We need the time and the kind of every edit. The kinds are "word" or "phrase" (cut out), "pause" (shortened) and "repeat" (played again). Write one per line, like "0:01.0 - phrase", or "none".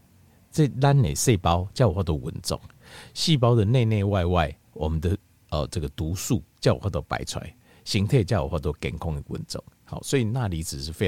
none